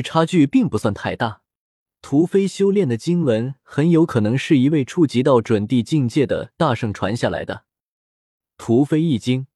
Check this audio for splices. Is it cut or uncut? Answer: uncut